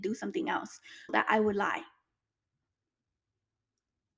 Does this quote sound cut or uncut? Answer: cut